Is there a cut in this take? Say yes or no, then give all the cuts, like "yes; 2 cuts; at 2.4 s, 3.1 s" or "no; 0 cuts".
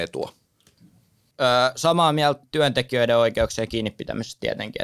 yes; 1 cut; at 2.4 s